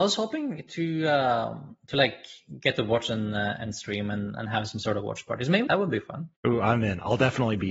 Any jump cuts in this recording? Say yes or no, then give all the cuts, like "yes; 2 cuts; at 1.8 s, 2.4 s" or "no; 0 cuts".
yes; 2 cuts; at 5.7 s, 6.4 s